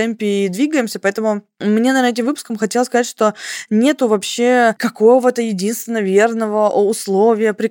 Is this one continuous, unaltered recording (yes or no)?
yes